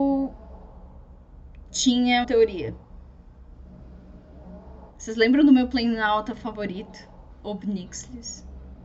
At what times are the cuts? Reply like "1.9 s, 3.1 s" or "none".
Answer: 2.2 s, 4.9 s, 7.3 s